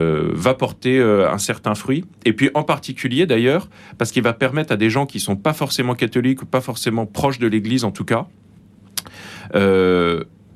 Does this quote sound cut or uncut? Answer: uncut